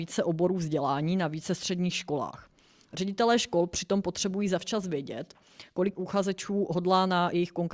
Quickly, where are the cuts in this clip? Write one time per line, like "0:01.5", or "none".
0:05.9